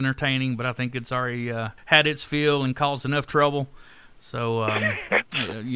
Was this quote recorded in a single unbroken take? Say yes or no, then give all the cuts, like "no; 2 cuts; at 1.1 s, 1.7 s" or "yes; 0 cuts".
no; 1 cut; at 1.8 s